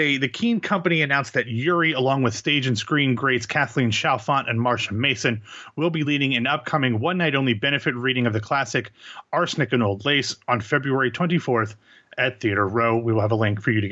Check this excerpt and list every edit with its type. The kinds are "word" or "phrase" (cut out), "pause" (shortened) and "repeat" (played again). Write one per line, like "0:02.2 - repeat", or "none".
none